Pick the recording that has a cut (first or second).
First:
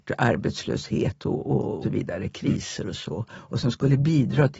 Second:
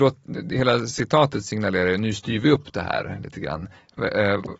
first